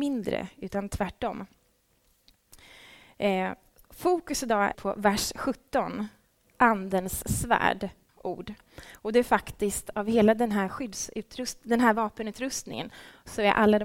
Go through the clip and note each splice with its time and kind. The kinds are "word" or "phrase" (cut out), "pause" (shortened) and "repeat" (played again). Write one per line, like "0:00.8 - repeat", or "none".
0:04.7 - word
0:08.1 - word

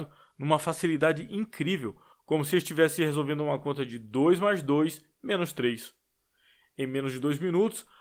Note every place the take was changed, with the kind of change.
none

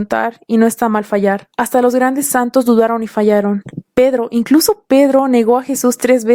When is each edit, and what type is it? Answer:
0:01.5 - pause
0:03.9 - pause

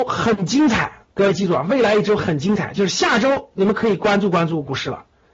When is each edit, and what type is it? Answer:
0:01.1 - pause

